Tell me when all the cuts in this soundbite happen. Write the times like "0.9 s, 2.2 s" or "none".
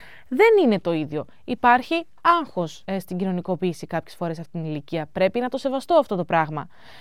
2.8 s